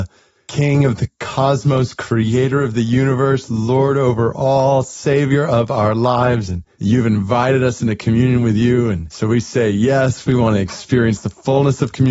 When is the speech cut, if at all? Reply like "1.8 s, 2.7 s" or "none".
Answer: none